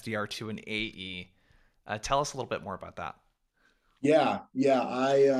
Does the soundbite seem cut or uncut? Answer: uncut